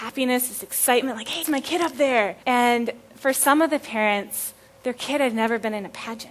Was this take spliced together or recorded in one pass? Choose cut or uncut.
cut